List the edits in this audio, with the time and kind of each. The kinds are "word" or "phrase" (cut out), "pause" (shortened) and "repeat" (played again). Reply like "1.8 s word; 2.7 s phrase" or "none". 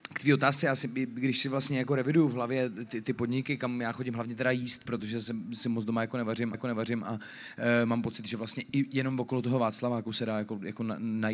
6.5 s repeat